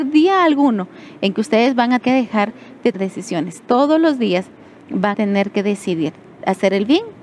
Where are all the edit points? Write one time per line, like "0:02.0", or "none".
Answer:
0:02.0
0:02.9
0:05.1